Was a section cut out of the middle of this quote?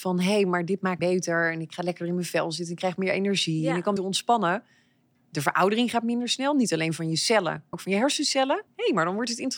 yes; 4 cuts; at 1.0 s, 4.0 s, 7.7 s, 8.7 s

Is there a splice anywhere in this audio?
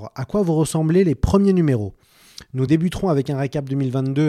no; 0 cuts

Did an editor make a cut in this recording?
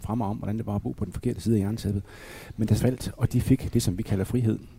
yes; 1 cut; at 2.8 s

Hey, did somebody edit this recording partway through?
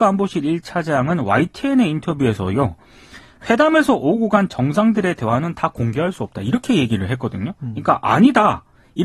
no; 0 cuts

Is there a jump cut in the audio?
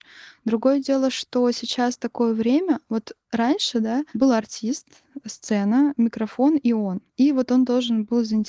yes; 2 cuts; at 3.2 s, 4.1 s

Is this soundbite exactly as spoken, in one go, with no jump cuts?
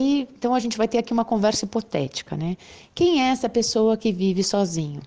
yes; 0 cuts

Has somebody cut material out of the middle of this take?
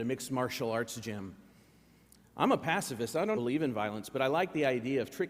yes; 1 cut; at 3.4 s

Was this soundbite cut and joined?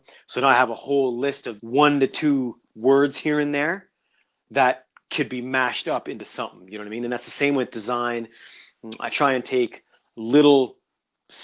yes; 1 cut; at 1.6 s

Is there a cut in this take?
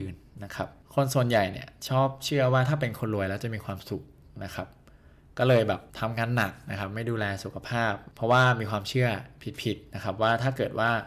yes; 1 cut; at 5.9 s

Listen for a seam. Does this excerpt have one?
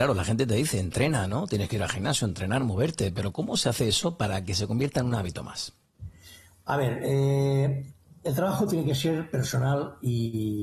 no; 0 cuts

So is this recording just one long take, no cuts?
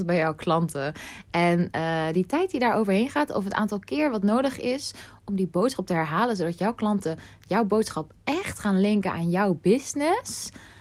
yes; 0 cuts

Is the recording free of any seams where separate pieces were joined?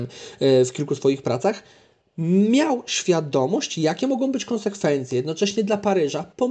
yes; 0 cuts

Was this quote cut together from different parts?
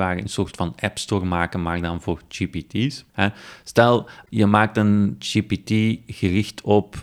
yes; 1 cut; at 3.1 s

